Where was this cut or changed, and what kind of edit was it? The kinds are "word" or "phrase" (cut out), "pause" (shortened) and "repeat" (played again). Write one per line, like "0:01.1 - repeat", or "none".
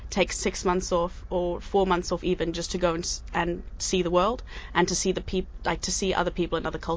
none